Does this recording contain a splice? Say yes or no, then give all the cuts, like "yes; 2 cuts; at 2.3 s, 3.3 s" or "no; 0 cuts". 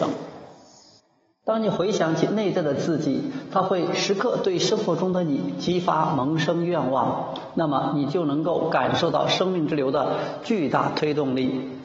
yes; 1 cut; at 1.0 s